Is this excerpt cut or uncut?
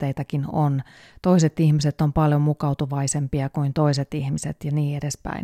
uncut